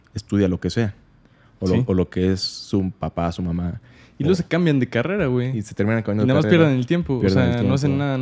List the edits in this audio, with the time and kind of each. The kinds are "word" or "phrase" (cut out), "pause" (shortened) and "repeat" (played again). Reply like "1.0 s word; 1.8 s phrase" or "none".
none